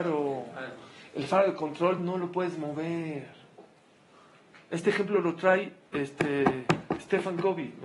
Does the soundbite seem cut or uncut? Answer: uncut